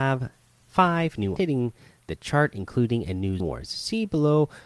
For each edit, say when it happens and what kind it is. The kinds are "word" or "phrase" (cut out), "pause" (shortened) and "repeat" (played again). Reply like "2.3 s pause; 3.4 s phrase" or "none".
1.4 s word; 3.4 s word